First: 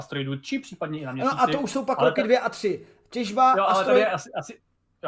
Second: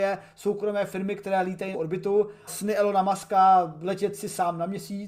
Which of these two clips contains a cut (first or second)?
second